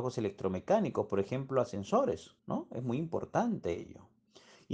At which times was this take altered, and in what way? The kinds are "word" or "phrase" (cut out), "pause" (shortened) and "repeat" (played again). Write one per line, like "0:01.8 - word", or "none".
0:02.4 - pause